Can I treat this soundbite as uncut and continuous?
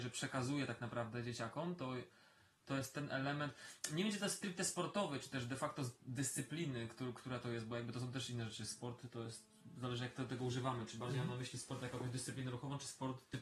yes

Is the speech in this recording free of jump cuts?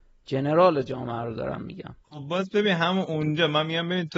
no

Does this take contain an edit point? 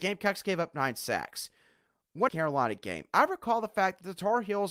yes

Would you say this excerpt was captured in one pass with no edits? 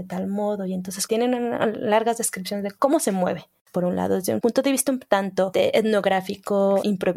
no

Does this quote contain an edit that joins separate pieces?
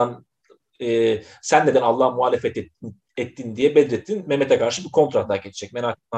no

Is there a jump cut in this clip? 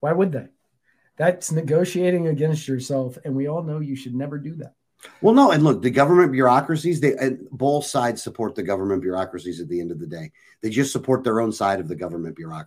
no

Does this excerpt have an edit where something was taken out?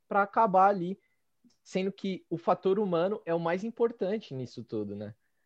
no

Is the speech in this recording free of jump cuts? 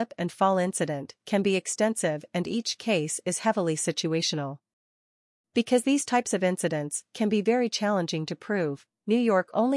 yes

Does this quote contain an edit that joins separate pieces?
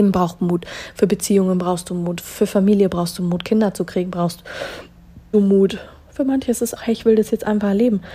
yes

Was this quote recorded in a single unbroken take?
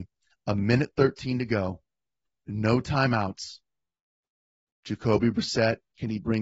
yes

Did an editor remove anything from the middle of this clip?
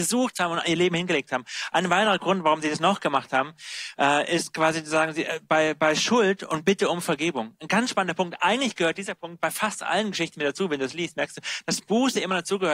no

